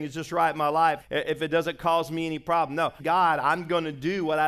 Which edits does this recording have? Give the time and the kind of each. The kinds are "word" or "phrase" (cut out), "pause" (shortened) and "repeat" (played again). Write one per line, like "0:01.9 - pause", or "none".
0:01.0 - word
0:03.0 - phrase